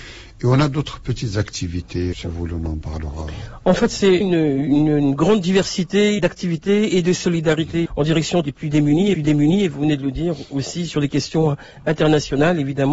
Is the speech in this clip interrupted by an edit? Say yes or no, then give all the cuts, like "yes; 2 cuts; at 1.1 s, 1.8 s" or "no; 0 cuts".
yes; 6 cuts; at 2.1 s, 4.2 s, 6.2 s, 7.9 s, 8.4 s, 9.1 s